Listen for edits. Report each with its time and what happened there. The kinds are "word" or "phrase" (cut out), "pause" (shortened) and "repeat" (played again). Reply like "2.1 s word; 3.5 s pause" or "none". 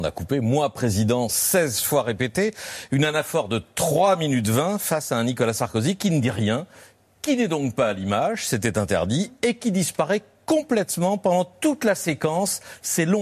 none